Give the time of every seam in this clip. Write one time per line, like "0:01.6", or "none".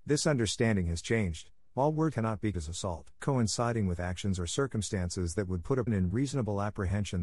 0:02.1
0:02.5
0:03.2
0:05.9